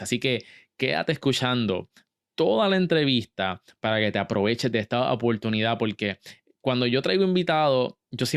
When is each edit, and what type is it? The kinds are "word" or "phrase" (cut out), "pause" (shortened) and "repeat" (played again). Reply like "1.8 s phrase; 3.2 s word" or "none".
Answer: none

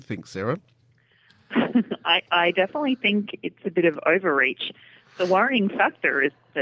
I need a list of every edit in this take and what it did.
none

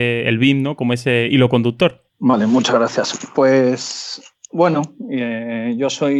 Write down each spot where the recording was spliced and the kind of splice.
2.1 s pause

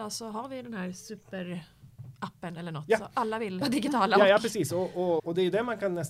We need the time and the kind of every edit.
3.6 s word; 5.2 s word

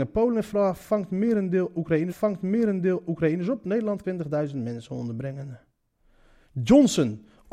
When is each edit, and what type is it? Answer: 2.1 s repeat; 4.0 s word; 5.9 s pause

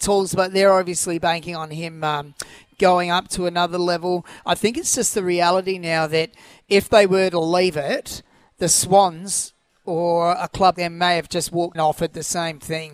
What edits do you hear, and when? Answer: 10.7 s word; 11.7 s phrase

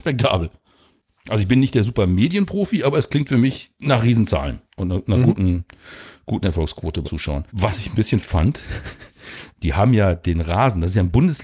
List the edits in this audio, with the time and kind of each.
3.7 s pause; 4.7 s pause; 7.0 s word; 7.5 s pause; 8.2 s word; 9.5 s word

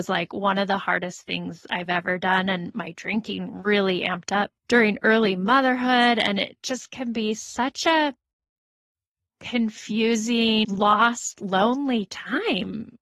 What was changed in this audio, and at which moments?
4.6 s pause

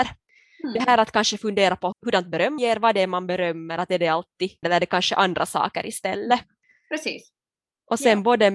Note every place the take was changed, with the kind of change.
1.9 s word; 2.6 s word; 4.6 s word

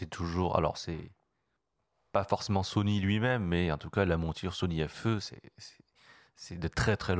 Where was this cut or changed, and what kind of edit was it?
none

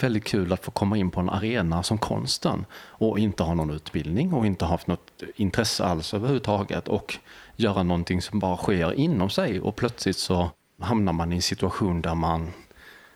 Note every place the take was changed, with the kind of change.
none

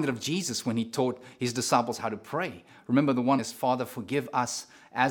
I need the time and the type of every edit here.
3.4 s word

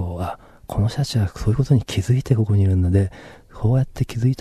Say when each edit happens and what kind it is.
none

